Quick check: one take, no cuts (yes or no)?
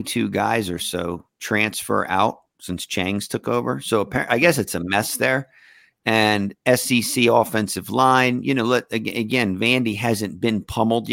yes